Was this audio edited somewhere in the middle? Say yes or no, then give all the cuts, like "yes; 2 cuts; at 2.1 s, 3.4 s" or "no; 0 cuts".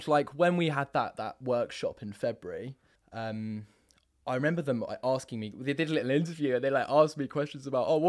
yes; 1 cut; at 3.0 s